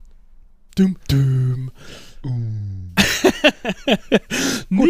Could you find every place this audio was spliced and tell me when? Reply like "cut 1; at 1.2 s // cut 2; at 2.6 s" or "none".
cut 1; at 1.0 s